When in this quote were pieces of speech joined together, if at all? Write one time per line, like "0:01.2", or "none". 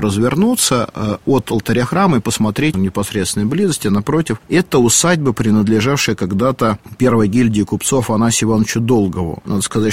0:02.7